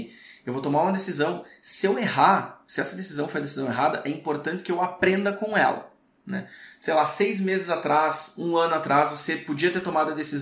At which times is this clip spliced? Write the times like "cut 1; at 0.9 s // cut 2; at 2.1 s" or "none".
none